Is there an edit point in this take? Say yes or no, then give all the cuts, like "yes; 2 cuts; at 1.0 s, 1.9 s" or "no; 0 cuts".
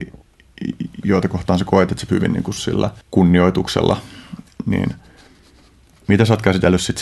yes; 3 cuts; at 2.1 s, 2.6 s, 3.0 s